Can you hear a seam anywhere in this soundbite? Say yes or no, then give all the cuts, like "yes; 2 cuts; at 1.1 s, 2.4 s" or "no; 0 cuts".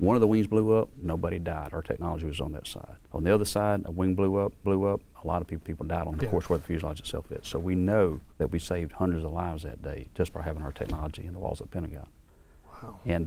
yes; 6 cuts; at 0.9 s, 3.0 s, 4.6 s, 5.6 s, 6.1 s, 8.3 s